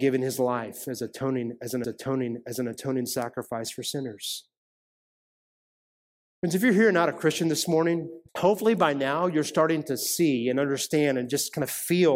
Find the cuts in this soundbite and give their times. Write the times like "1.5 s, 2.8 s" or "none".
1.8 s, 8.3 s